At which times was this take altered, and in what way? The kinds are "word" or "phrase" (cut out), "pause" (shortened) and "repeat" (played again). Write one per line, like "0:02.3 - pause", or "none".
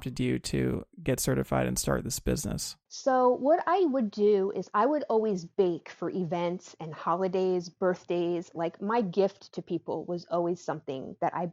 0:02.8 - pause